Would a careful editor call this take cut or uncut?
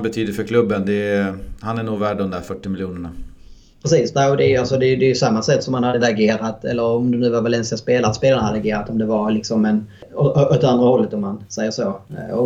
cut